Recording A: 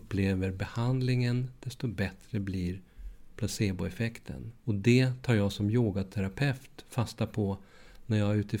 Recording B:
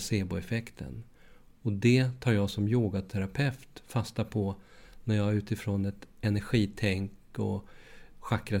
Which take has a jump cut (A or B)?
A